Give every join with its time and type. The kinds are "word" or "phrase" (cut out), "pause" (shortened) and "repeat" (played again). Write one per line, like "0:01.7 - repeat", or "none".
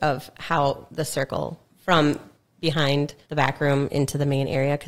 0:01.6 - word
0:03.2 - pause